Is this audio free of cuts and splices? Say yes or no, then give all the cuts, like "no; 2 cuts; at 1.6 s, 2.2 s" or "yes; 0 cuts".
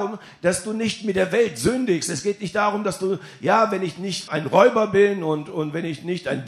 no; 1 cut; at 4.3 s